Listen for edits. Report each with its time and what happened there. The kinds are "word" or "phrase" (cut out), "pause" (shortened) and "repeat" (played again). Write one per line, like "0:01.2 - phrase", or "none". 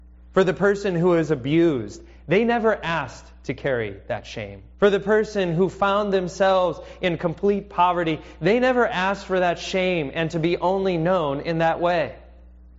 0:04.7 - pause